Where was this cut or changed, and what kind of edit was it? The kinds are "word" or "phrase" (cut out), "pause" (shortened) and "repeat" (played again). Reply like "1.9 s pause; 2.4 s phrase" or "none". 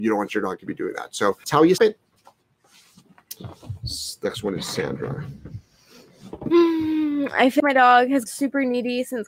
1.4 s word; 1.8 s word; 7.6 s word; 8.3 s word